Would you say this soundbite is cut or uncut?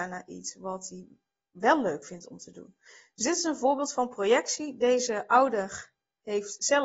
uncut